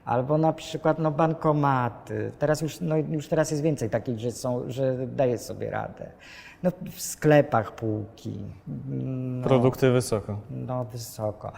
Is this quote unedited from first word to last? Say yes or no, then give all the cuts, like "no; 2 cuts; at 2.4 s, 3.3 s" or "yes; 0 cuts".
no; 1 cut; at 8.6 s